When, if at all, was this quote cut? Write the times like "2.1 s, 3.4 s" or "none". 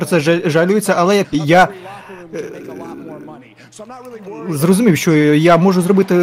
1.2 s

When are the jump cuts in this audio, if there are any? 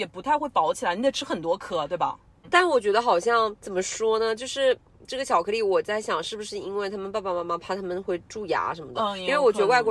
3.6 s

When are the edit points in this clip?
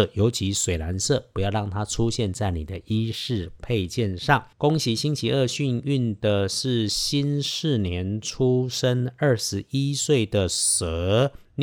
4.5 s

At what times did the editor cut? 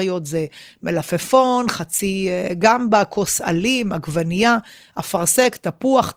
none

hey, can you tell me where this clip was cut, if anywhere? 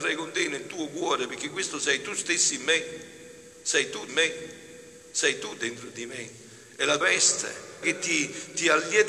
4.1 s, 7.0 s, 7.8 s

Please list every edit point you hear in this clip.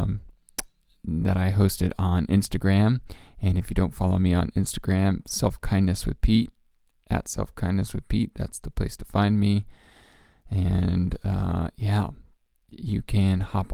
none

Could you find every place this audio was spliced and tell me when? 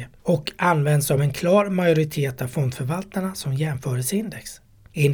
none

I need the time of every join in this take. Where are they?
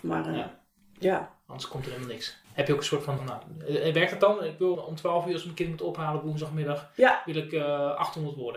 2.4 s, 3.2 s, 4.7 s

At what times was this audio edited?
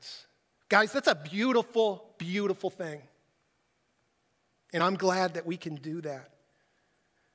none

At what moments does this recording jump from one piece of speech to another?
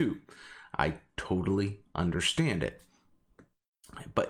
none

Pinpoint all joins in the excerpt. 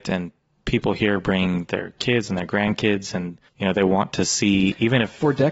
3.5 s

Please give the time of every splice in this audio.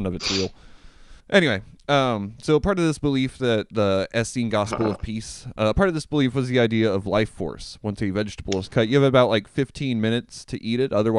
1.2 s

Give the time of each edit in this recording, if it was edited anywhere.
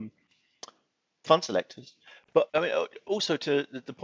1.2 s, 2.5 s

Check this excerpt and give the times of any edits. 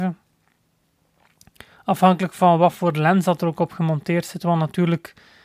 none

